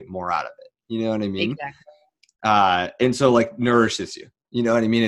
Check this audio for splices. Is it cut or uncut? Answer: uncut